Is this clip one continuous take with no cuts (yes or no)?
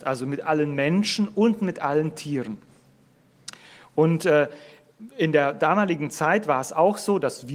yes